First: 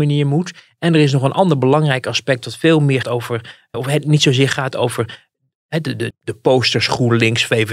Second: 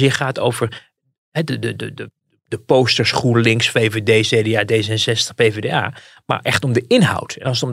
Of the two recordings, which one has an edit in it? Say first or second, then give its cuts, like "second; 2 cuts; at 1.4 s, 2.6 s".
first; 3 cuts; at 3.0 s, 3.7 s, 6.1 s